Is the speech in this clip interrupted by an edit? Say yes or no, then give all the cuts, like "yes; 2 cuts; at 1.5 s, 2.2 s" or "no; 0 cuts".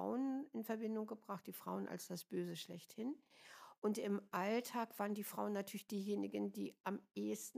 no; 0 cuts